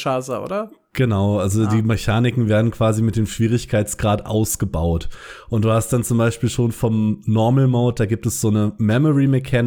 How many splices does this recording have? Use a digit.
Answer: 0